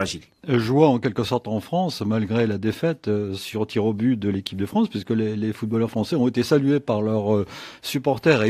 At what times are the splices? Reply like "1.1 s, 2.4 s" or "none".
none

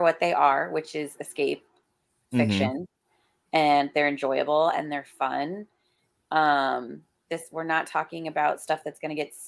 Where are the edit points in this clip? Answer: none

